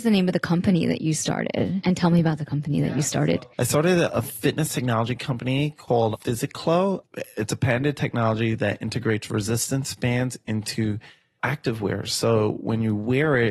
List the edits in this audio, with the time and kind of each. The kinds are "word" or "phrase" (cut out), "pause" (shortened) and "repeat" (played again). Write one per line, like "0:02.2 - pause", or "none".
none